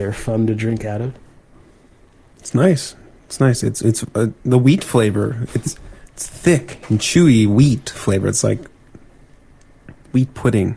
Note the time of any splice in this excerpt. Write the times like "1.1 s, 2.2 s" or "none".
none